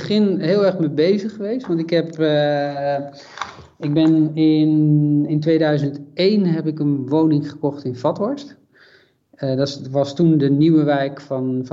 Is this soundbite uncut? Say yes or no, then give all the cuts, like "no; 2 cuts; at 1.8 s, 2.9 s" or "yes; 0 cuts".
yes; 0 cuts